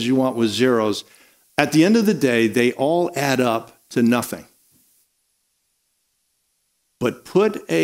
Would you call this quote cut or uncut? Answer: uncut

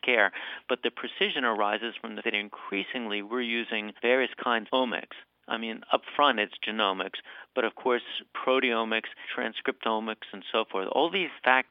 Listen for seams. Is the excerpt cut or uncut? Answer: cut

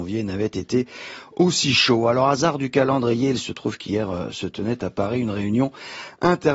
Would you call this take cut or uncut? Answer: uncut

